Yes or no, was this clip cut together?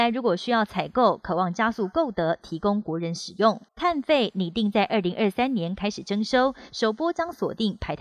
yes